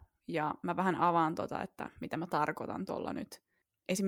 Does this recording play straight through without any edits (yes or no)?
yes